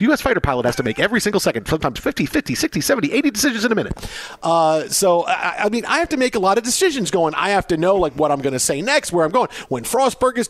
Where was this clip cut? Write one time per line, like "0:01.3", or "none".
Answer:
none